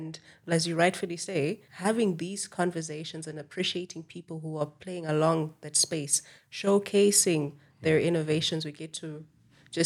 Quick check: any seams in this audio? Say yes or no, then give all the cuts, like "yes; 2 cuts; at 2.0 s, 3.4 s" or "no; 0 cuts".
yes; 1 cut; at 1.7 s